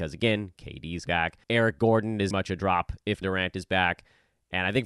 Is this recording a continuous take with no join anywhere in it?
no; 4 cuts; at 1.1 s, 1.4 s, 2.3 s, 3.2 s

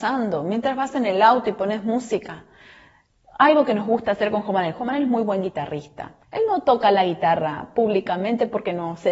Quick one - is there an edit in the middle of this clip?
yes; 1 cut; at 6.2 s

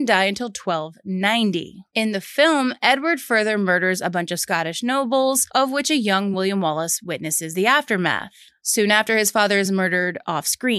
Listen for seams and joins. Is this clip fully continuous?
yes; 0 cuts

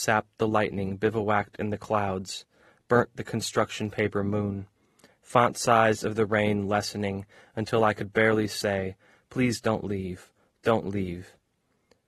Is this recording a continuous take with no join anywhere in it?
yes; 0 cuts

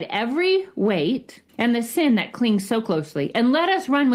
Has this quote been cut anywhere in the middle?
yes; 1 cut; at 1.5 s

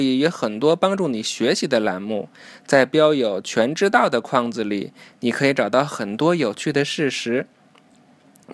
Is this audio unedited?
yes; 0 cuts

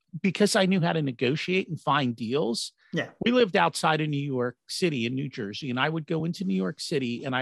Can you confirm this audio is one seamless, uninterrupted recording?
yes; 0 cuts

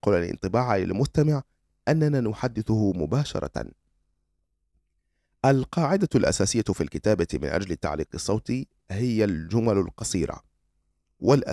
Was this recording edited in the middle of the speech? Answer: no; 0 cuts

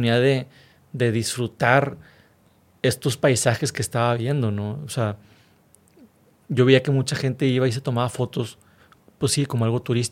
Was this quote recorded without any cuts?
yes; 0 cuts

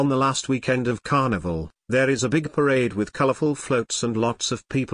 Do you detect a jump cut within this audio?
no; 0 cuts

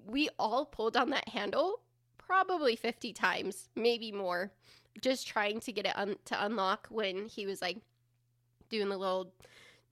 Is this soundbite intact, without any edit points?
yes; 0 cuts

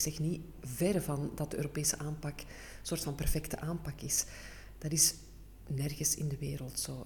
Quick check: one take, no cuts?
yes; 0 cuts

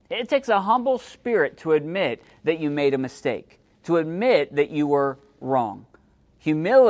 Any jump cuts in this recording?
no; 0 cuts

